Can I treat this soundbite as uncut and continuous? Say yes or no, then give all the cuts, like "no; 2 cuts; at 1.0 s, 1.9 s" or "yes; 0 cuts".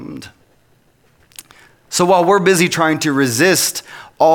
yes; 0 cuts